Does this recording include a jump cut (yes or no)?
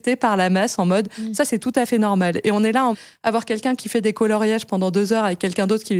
yes